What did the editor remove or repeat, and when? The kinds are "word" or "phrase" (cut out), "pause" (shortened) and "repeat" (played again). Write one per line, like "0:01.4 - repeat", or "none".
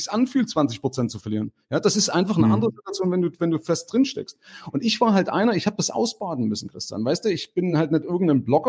none